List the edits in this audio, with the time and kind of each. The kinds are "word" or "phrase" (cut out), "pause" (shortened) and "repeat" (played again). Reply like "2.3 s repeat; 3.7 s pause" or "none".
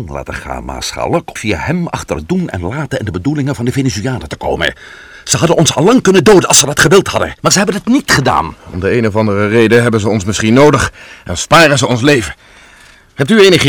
1.4 s word; 7.4 s pause; 8.6 s pause